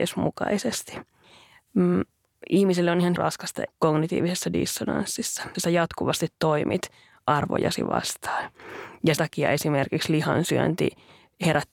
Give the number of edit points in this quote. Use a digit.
4